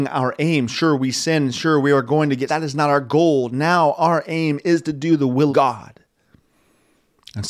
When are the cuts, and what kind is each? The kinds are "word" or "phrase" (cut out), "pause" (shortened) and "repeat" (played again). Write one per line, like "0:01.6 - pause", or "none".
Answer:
0:02.5 - phrase
0:05.5 - word